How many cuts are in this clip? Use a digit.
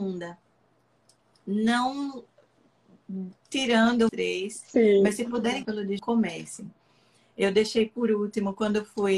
3